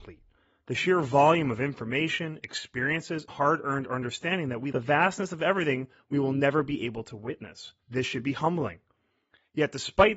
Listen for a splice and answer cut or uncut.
cut